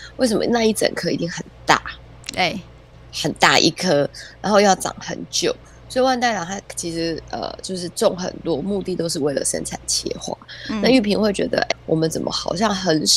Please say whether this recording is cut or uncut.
cut